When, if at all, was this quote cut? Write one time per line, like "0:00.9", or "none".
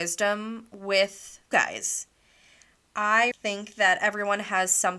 0:01.5
0:03.3

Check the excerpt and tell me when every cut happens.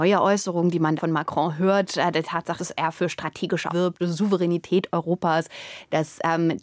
0:01.0
0:02.6
0:03.7
0:04.0

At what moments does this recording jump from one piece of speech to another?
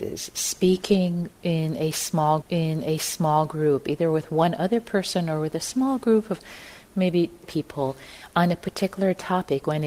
0:02.4
0:07.4

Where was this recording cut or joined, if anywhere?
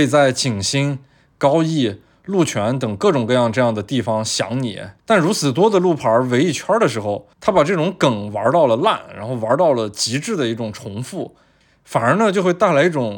0:05.0
0:07.3

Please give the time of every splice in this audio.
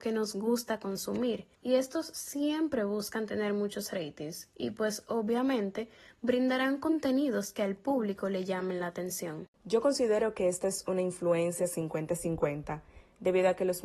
0:01.6

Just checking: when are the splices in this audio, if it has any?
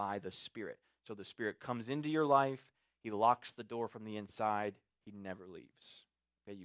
none

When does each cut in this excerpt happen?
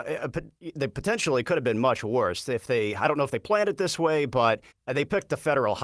0:04.7

